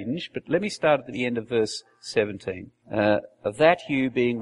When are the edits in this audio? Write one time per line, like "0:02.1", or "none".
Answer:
0:02.8